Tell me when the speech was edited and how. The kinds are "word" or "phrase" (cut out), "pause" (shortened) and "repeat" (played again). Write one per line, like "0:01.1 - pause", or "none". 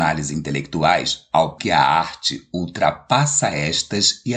0:01.6 - word